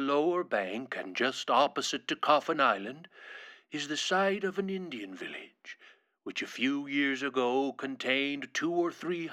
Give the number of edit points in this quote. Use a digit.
0